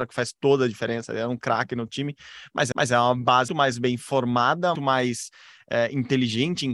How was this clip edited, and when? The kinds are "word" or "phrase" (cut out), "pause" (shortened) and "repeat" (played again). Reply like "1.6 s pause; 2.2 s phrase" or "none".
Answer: 2.7 s repeat; 3.5 s word; 4.8 s word